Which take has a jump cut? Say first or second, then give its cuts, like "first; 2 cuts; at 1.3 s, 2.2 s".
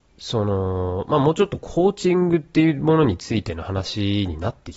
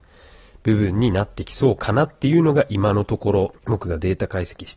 second; 1 cut; at 3.6 s